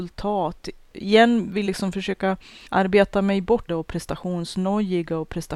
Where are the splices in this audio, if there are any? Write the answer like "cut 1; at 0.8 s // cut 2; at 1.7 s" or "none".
cut 1; at 1.7 s // cut 2; at 2.7 s // cut 3; at 3.7 s